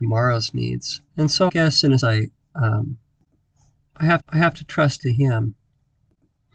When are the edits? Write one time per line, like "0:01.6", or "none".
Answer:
0:01.1
0:01.5
0:02.0
0:04.2
0:05.0